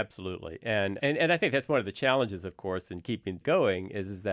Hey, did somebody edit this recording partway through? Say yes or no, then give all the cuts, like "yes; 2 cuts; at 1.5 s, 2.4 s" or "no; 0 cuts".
yes; 2 cuts; at 1.0 s, 3.4 s